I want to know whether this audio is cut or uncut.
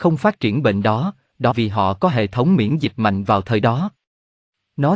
cut